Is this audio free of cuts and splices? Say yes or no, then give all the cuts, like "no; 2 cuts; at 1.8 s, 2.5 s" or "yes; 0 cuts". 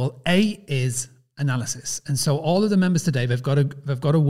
yes; 0 cuts